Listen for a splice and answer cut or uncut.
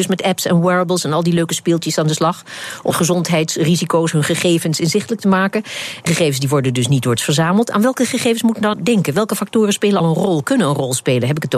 cut